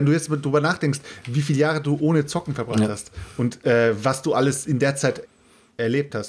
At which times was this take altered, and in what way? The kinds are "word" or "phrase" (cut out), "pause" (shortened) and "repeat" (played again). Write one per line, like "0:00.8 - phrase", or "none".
0:05.2 - word